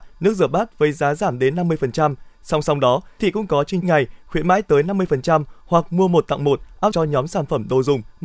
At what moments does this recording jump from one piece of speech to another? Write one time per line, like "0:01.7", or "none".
0:03.2
0:03.8
0:06.9